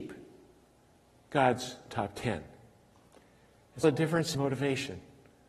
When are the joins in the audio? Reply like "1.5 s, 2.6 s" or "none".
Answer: 3.8 s, 4.3 s